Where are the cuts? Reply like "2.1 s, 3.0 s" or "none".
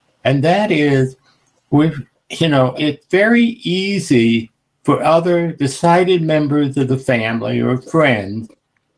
none